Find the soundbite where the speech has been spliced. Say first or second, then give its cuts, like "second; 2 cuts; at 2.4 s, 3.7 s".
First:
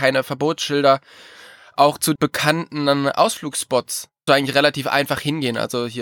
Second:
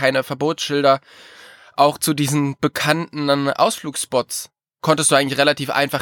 first; 2 cuts; at 2.2 s, 4.3 s